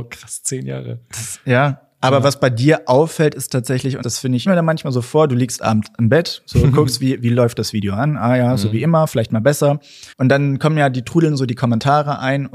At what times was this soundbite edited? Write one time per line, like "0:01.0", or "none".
0:04.0
0:04.5
0:10.1